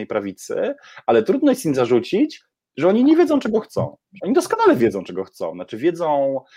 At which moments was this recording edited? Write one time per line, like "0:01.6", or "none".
none